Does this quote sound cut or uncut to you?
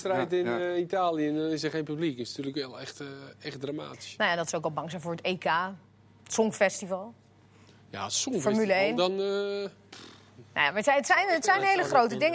uncut